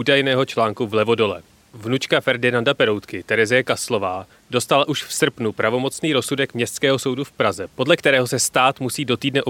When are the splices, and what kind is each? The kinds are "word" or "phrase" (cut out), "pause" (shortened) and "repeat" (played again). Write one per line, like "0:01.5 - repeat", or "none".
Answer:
none